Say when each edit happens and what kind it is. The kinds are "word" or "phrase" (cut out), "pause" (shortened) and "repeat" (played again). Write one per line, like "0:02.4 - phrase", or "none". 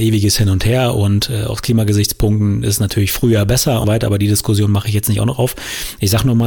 0:03.8 - word

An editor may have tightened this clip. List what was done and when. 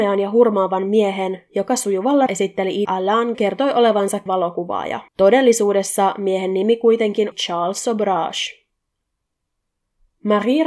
0:02.3 - word
0:02.9 - word
0:03.3 - phrase
0:04.3 - word
0:05.1 - pause
0:07.3 - word

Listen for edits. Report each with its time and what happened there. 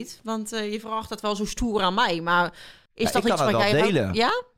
0:02.9 - pause

